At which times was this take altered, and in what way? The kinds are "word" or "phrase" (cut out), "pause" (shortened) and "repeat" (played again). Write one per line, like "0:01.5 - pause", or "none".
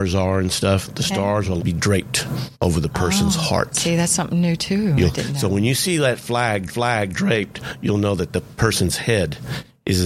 0:01.6 - word
0:02.5 - pause
0:06.7 - repeat